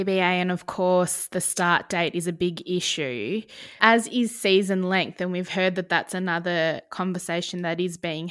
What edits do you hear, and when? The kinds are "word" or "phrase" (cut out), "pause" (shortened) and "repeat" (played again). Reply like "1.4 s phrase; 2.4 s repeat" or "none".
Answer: none